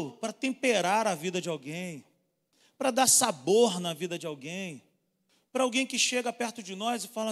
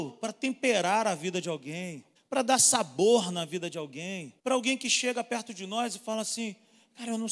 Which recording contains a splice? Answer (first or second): second